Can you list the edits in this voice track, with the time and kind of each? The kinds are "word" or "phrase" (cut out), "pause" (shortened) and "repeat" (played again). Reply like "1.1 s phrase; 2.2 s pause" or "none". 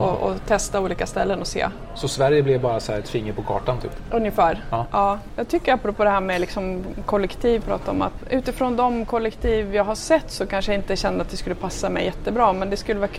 7.6 s phrase